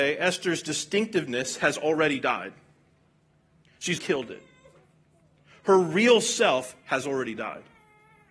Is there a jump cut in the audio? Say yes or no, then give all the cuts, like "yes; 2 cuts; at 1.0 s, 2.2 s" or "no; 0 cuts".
yes; 1 cut; at 3.9 s